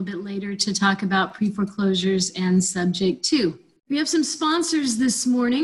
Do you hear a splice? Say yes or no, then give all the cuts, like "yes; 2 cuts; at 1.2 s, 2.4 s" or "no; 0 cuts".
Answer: no; 0 cuts